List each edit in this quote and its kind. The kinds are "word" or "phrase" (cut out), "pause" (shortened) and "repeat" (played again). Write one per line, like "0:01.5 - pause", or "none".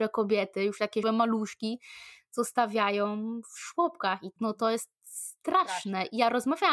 0:01.0 - word
0:04.4 - word